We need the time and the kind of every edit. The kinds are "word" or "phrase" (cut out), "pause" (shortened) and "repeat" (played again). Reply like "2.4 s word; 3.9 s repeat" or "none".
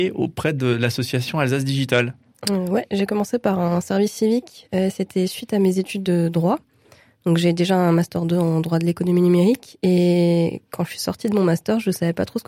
none